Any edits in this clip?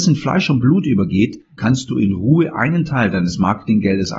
yes; 1 cut; at 1.6 s

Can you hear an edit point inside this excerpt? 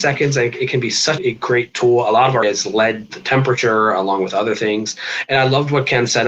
yes; 3 cuts; at 1.2 s, 2.4 s, 3.1 s

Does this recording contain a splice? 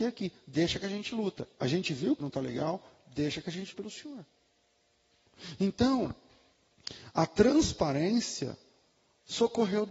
yes; 2 cuts; at 2.2 s, 3.7 s

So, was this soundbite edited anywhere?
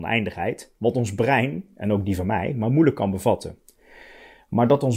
no; 0 cuts

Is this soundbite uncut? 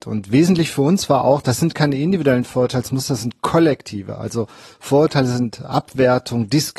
yes; 0 cuts

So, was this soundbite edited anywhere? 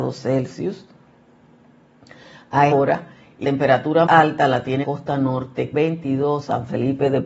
yes; 5 cuts; at 2.7 s, 3.4 s, 4.1 s, 4.8 s, 5.7 s

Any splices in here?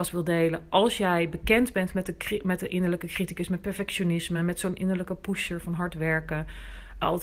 no; 0 cuts

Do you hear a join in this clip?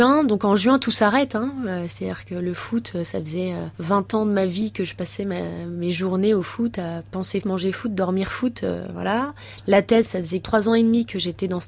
yes; 1 cut; at 7.4 s

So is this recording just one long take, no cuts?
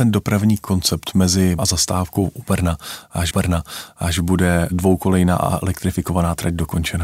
no; 2 cuts; at 1.6 s, 3.3 s

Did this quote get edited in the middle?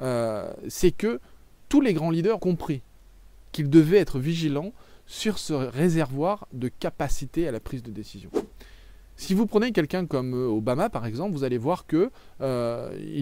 yes; 1 cut; at 2.4 s

